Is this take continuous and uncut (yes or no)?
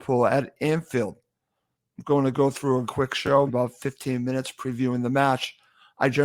no